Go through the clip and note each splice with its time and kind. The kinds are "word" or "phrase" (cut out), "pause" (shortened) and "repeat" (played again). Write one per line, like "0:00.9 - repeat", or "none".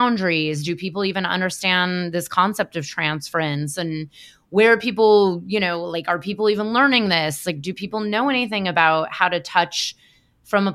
none